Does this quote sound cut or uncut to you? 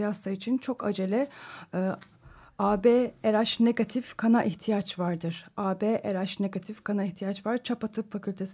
uncut